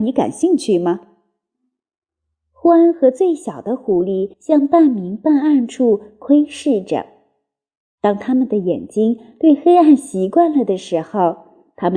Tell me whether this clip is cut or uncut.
cut